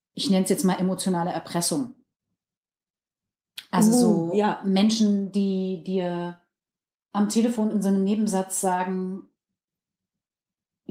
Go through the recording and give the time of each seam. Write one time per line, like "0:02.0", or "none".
none